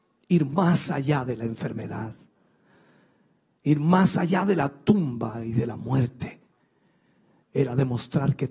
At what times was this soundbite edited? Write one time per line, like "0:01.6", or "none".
none